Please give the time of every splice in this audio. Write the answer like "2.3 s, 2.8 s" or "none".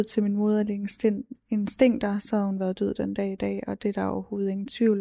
none